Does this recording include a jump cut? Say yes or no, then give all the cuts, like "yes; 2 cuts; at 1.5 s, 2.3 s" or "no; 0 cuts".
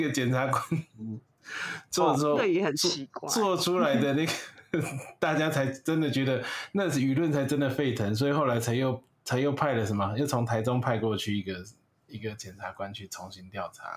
no; 0 cuts